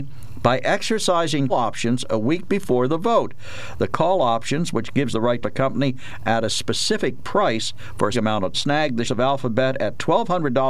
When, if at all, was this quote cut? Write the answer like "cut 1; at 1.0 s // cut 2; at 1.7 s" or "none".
cut 1; at 1.5 s // cut 2; at 5.1 s // cut 3; at 5.4 s // cut 4; at 8.1 s // cut 5; at 8.5 s // cut 6; at 9.0 s